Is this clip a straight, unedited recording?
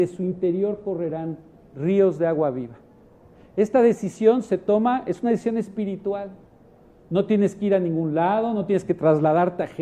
yes; 0 cuts

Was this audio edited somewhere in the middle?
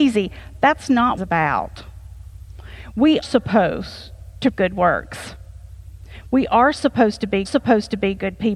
yes; 4 cuts; at 1.2 s, 3.2 s, 4.5 s, 7.4 s

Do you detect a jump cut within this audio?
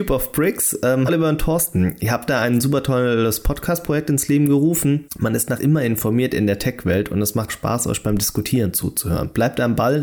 yes; 4 cuts; at 1.1 s, 5.1 s, 5.6 s, 7.5 s

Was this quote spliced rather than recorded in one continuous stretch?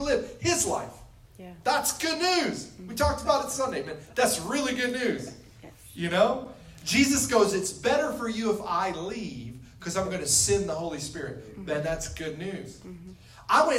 no; 0 cuts

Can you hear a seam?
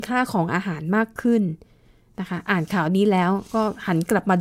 no; 0 cuts

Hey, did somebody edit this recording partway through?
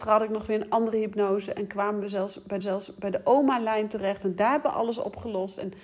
yes; 1 cut; at 2.6 s

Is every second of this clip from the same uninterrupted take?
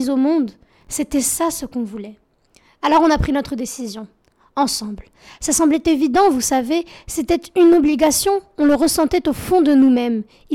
yes; 0 cuts

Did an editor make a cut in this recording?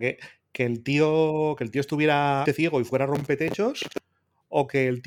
yes; 1 cut; at 2.5 s

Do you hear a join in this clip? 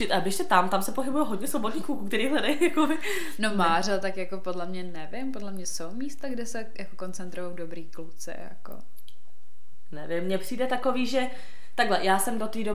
no; 0 cuts

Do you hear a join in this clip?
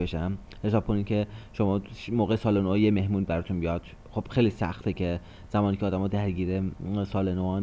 no; 0 cuts

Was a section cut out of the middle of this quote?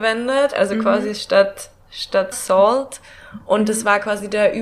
yes; 1 cut; at 2.3 s

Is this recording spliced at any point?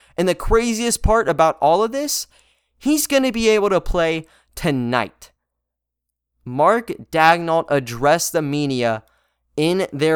no; 0 cuts

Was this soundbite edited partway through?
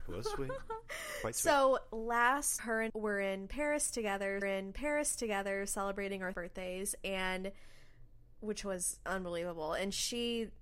yes; 4 cuts; at 2.6 s, 2.9 s, 4.4 s, 6.3 s

